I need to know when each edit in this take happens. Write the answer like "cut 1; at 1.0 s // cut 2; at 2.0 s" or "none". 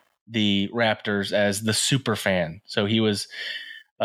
none